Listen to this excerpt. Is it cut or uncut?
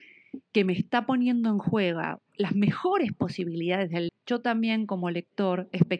cut